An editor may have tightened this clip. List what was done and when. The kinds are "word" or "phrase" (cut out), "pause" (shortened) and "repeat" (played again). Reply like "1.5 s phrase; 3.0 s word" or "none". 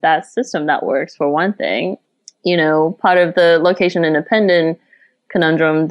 none